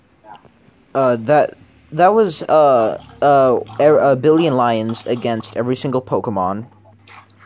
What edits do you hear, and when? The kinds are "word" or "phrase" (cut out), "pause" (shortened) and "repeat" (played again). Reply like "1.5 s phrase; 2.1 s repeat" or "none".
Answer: none